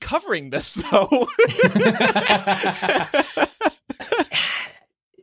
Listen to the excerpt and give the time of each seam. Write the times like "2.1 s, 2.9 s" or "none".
4.0 s